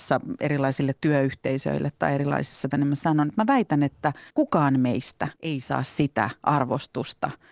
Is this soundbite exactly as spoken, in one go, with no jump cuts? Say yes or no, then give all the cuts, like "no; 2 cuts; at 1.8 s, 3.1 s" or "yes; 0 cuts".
no; 3 cuts; at 2.7 s, 4.3 s, 5.4 s